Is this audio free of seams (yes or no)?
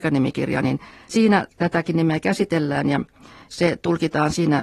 yes